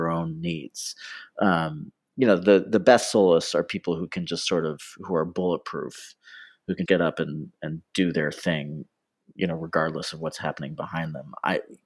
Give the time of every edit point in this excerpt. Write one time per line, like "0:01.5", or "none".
0:06.9